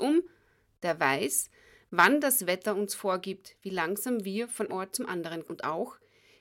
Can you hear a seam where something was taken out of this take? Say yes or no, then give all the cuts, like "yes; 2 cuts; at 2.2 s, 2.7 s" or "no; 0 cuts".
yes; 2 cuts; at 4.7 s, 5.4 s